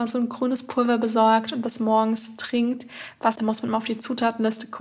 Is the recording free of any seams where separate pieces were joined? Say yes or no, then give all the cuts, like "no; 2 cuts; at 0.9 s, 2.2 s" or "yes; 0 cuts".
no; 1 cut; at 3.4 s